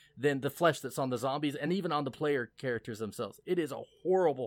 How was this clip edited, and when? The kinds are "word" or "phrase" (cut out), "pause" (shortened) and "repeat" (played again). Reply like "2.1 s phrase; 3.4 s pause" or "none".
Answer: none